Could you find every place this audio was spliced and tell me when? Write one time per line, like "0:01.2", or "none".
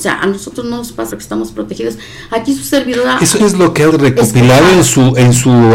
0:01.1
0:03.4
0:03.9